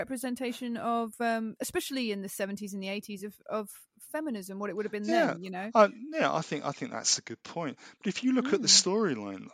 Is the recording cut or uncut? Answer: uncut